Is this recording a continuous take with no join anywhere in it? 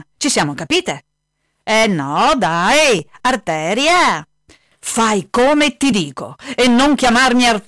yes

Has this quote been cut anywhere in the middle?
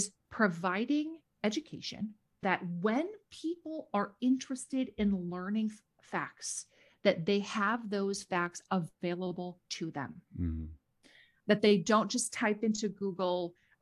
yes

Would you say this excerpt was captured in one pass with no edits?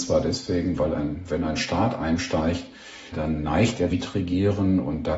no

